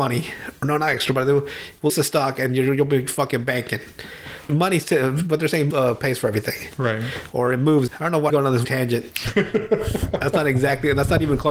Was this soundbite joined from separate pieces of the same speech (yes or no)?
yes